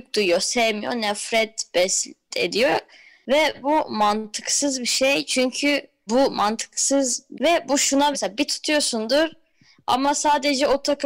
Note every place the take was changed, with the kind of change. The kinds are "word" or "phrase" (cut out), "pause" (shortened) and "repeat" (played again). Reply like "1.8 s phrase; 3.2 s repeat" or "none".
2.3 s word; 3.6 s word; 6.1 s word; 7.3 s word; 8.1 s word; 8.5 s word